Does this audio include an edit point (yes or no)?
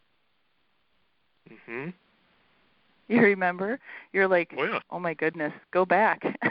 no